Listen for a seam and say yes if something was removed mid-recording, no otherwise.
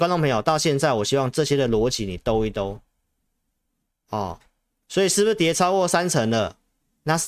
no